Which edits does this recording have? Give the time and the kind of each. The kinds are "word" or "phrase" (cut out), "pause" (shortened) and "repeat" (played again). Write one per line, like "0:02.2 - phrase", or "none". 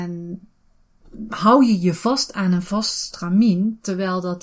none